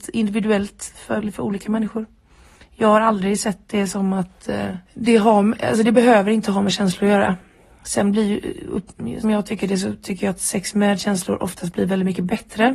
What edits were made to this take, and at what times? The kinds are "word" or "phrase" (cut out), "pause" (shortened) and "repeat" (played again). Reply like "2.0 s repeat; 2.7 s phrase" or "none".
1.2 s word; 4.8 s pause; 9.2 s word